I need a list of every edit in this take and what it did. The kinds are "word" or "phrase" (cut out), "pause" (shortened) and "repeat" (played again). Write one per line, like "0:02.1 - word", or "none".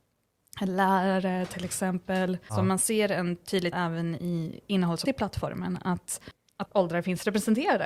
0:03.7 - word
0:05.1 - word
0:06.7 - word